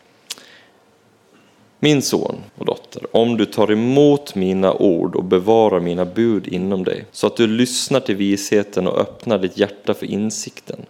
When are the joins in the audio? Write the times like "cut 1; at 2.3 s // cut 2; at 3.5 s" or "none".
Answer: cut 1; at 2.5 s // cut 2; at 7.1 s

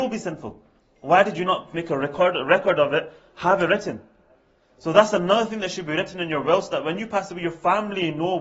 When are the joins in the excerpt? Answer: none

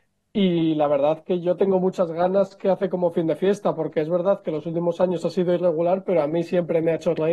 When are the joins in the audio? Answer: none

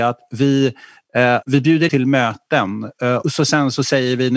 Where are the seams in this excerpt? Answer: cut 1; at 1.4 s // cut 2; at 1.9 s // cut 3; at 3.2 s

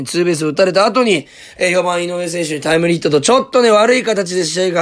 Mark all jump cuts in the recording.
none

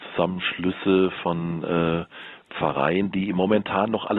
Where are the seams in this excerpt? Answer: none

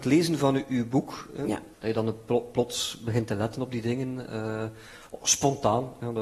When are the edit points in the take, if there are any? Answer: cut 1; at 1.7 s

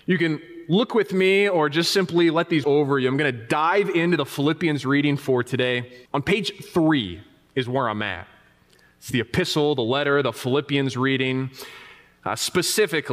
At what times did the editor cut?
cut 1; at 2.6 s // cut 2; at 6.1 s

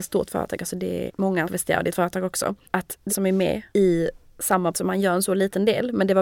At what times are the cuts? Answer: cut 1; at 1.1 s // cut 2; at 1.5 s // cut 3; at 1.9 s // cut 4; at 2.6 s // cut 5; at 3.1 s // cut 6; at 3.7 s // cut 7; at 4.7 s

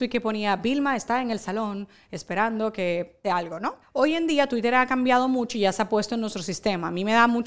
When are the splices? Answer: cut 1; at 3.2 s // cut 2; at 3.8 s

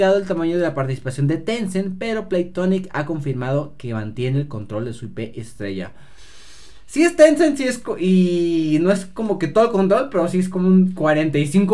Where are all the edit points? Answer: none

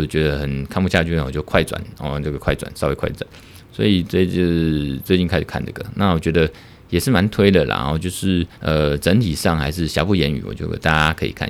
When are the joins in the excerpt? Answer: cut 1; at 8.5 s

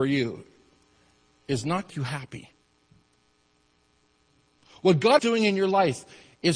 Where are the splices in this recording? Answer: cut 1; at 1.9 s // cut 2; at 5.2 s

